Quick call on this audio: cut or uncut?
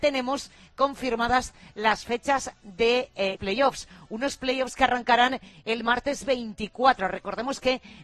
cut